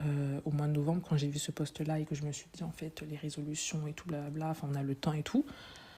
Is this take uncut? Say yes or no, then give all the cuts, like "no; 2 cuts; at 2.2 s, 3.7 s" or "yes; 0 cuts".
yes; 0 cuts